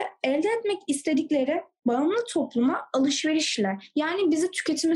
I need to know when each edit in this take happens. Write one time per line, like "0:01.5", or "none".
none